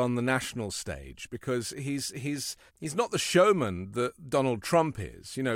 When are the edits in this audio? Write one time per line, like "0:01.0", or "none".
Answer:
0:02.7